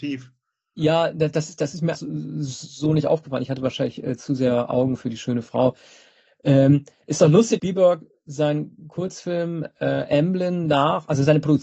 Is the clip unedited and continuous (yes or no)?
no